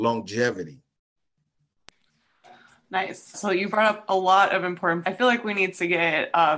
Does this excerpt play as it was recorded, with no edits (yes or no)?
no